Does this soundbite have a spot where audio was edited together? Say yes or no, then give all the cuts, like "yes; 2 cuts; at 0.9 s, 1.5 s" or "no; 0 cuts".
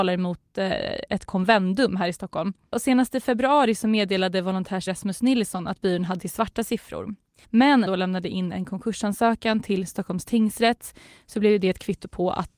yes; 4 cuts; at 1.3 s, 4.9 s, 6.2 s, 7.9 s